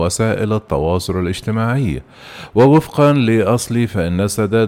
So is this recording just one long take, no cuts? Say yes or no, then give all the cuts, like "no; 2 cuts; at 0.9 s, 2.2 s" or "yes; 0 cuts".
yes; 0 cuts